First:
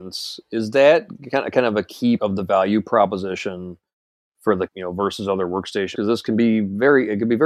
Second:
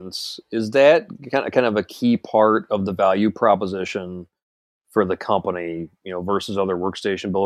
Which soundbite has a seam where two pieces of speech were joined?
first; 3 cuts; at 2.2 s, 4.7 s, 5.9 s

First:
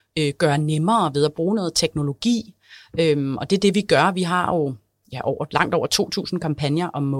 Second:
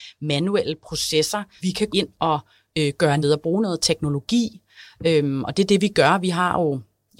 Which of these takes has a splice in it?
second; 3 cuts; at 1.6 s, 1.9 s, 3.2 s

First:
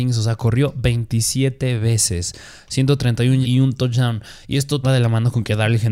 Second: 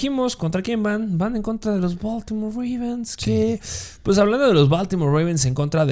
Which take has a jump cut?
first; 2 cuts; at 3.4 s, 4.8 s

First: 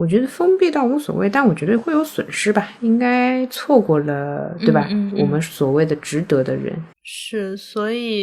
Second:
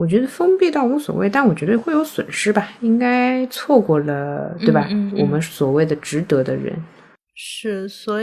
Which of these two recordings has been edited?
first; 1 cut; at 6.9 s

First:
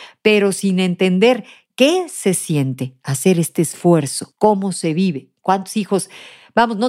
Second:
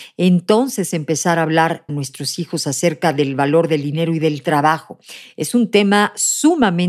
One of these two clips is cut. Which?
second; 1 cut; at 1.9 s

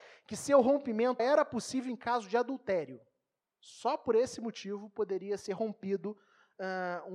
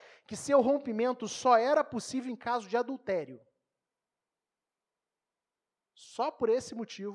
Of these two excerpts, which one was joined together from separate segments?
first; 2 cuts; at 1.2 s, 3.4 s

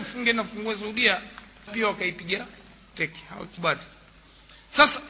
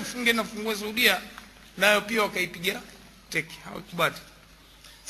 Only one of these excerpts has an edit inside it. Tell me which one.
first; 1 cut; at 1.7 s

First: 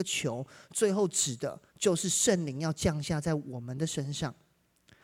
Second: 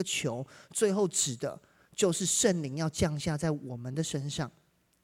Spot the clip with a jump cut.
first; 1 cut; at 1.7 s

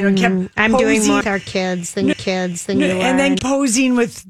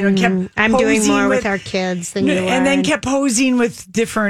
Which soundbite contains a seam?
first; 3 cuts; at 1.2 s, 2.1 s, 3.4 s

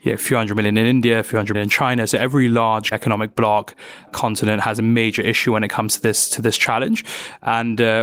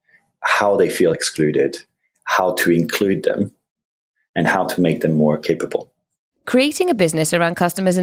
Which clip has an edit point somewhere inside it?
first; 3 cuts; at 1.5 s, 2.9 s, 4.1 s

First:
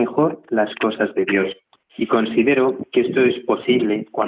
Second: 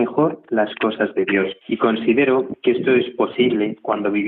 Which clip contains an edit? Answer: second; 1 cut; at 1.6 s

